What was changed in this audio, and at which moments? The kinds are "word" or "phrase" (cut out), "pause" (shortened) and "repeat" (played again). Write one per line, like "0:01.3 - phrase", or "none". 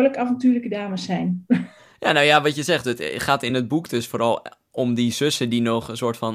none